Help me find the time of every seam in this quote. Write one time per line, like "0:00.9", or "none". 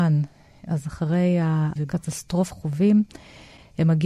0:01.8
0:02.5

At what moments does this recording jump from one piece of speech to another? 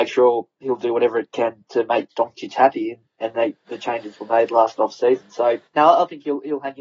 0:05.7

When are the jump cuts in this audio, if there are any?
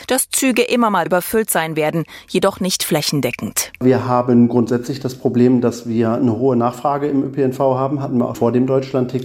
0:01.1
0:08.3

